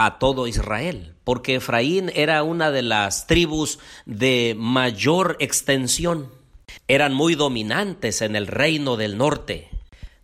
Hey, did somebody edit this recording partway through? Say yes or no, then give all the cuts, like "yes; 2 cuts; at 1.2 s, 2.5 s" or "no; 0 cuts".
no; 0 cuts